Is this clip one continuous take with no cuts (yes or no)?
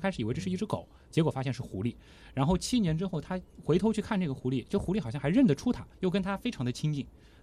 no